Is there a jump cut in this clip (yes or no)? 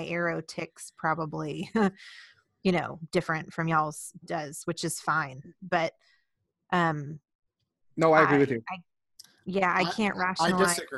no